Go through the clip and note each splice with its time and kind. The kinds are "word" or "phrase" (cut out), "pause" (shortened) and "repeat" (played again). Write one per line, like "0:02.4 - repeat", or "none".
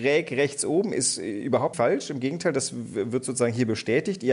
0:01.7 - word